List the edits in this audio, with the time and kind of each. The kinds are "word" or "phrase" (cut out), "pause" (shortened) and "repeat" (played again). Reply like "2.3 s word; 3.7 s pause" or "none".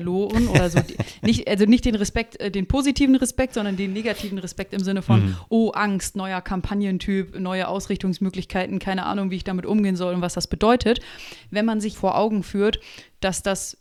11.9 s word